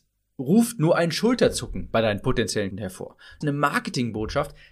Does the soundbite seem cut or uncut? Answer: cut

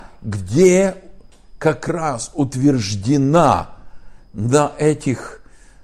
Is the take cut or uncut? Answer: uncut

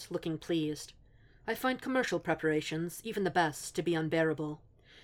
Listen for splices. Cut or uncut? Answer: uncut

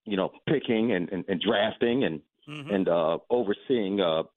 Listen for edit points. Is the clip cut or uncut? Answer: uncut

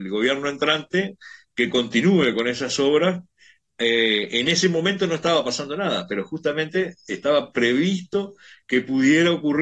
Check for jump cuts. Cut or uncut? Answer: uncut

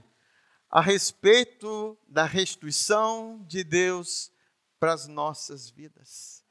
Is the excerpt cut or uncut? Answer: uncut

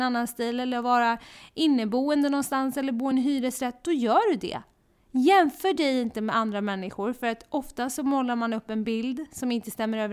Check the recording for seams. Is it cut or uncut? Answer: uncut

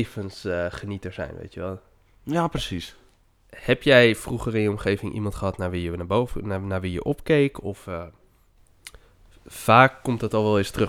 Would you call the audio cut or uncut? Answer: uncut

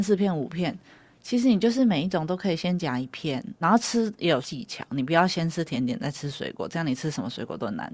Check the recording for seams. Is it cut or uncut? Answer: cut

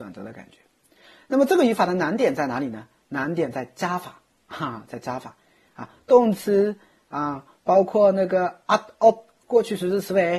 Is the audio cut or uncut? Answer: uncut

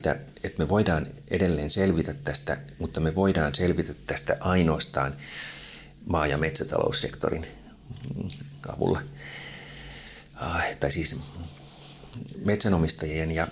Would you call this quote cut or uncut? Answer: uncut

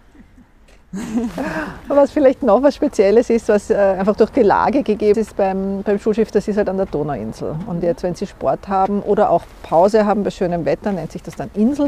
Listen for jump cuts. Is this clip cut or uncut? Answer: cut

